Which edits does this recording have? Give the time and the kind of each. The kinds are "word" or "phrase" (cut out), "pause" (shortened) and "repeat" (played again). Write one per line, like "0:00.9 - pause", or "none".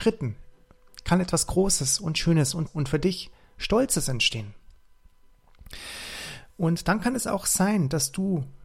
0:02.7 - word